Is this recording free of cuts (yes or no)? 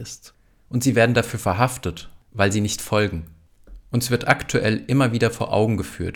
yes